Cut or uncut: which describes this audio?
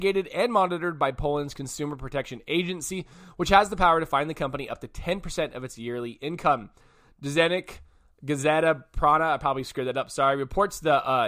uncut